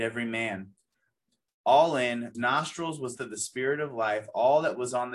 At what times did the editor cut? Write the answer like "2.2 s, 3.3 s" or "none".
2.3 s, 3.2 s